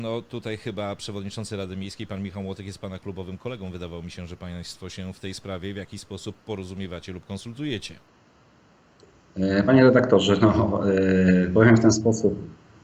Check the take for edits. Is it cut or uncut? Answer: uncut